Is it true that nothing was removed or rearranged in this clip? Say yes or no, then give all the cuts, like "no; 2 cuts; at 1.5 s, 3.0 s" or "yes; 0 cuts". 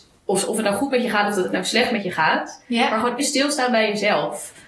no; 1 cut; at 3.2 s